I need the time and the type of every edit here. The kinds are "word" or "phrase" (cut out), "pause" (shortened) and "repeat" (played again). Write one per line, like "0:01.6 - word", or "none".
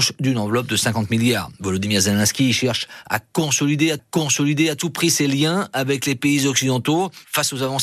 0:04.0 - repeat